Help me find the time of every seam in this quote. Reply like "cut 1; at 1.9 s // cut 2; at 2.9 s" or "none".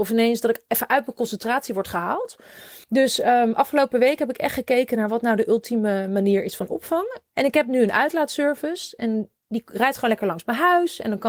cut 1; at 2.8 s

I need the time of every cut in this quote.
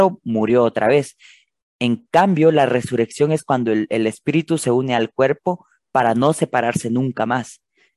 none

